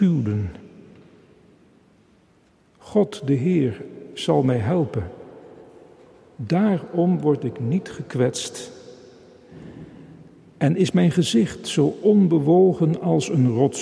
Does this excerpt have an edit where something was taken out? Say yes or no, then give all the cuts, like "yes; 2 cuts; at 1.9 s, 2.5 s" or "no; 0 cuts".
no; 0 cuts